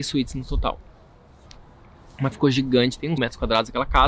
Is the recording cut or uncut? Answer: cut